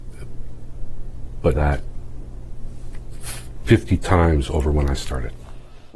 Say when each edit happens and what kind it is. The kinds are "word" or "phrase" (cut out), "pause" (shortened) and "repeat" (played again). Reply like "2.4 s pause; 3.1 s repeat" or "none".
1.5 s word